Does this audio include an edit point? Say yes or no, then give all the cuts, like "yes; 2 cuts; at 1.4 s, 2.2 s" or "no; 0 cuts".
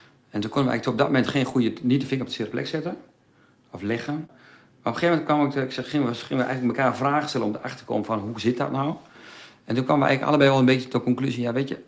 no; 0 cuts